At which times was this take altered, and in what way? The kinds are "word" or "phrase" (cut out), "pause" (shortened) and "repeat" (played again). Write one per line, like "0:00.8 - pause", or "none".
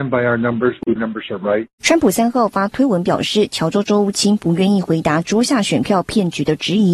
0:01.0 - phrase
0:01.7 - pause